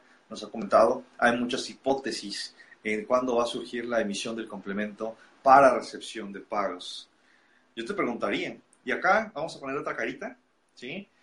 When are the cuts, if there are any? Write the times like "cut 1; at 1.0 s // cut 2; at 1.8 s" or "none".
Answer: none